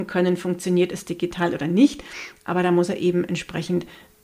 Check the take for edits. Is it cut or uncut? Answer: uncut